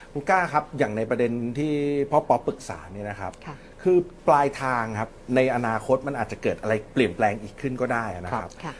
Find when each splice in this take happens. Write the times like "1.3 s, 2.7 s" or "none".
4.2 s